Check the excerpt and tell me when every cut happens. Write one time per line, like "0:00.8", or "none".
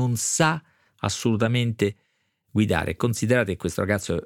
none

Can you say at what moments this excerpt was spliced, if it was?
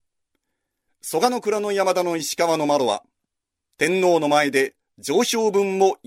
none

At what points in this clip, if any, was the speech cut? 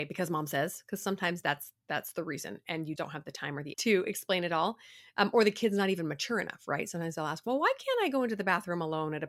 0:01.8
0:03.0
0:03.7

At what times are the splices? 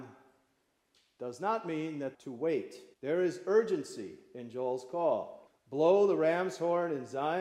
0:02.1
0:02.9
0:05.5

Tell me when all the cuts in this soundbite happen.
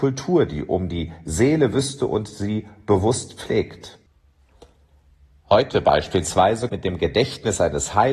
0:06.7

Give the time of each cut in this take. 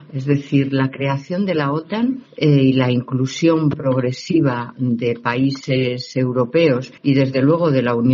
0:02.3
0:07.0

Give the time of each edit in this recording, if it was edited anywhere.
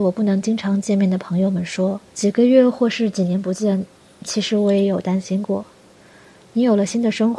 0:02.1

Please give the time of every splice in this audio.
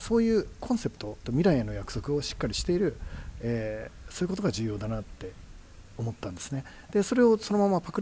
0:01.2

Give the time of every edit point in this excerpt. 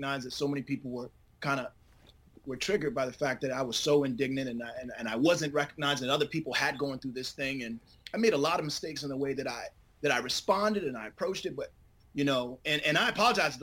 none

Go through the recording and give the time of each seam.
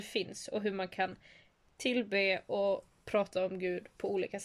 none

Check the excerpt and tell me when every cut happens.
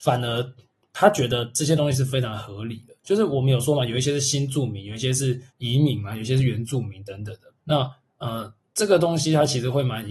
0:05.5
0:07.6

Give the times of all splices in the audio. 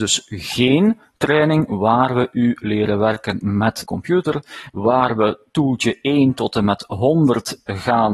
0:03.8

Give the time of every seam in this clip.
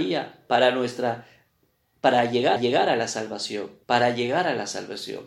0:02.6
0:03.8

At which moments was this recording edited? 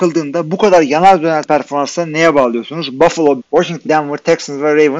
0:01.4
0:03.4
0:03.9

